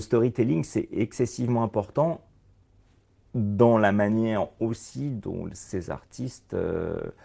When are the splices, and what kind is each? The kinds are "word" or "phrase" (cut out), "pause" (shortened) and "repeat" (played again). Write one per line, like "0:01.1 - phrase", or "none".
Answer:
none